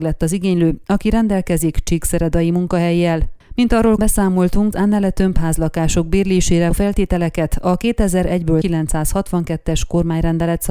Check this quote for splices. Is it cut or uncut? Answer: cut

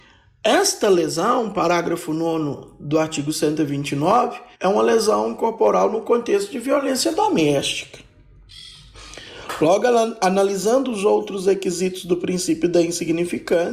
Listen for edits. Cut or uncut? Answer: cut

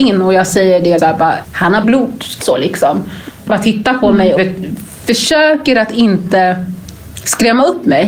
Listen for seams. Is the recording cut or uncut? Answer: cut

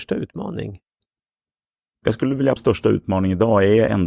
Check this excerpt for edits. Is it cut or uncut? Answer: cut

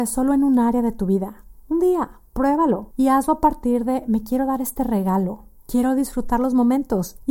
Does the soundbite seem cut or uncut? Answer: uncut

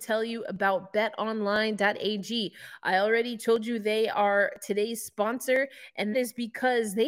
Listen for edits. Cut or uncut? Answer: cut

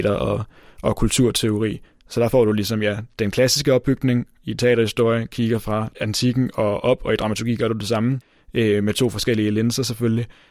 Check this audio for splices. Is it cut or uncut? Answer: uncut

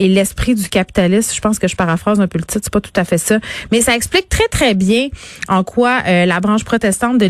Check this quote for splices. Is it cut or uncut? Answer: uncut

